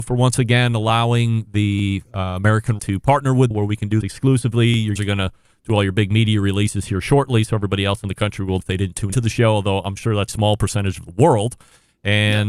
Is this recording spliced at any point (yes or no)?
yes